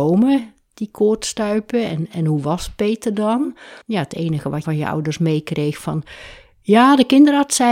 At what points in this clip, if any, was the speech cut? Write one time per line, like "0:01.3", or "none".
0:03.8
0:04.6